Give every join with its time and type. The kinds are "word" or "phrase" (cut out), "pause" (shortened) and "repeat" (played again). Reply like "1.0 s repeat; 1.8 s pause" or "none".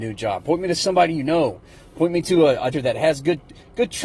2.7 s word